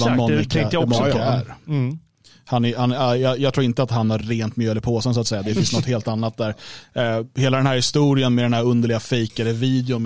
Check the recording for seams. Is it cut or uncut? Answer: uncut